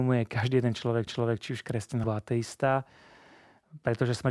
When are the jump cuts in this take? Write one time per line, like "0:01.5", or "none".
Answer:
0:01.1
0:02.0